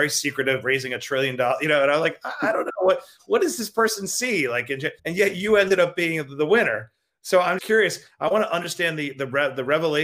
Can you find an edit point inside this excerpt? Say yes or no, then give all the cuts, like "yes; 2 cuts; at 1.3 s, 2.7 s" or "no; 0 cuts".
yes; 2 cuts; at 5.0 s, 7.6 s